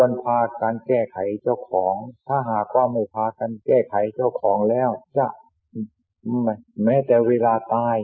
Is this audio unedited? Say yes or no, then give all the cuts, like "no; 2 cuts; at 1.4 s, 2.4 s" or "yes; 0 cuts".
no; 1 cut; at 3.6 s